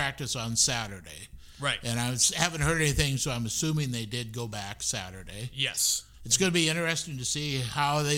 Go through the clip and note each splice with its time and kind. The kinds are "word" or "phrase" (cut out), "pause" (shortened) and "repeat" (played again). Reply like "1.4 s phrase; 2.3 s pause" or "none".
6.1 s pause